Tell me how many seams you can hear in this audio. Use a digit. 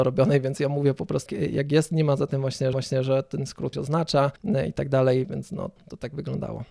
6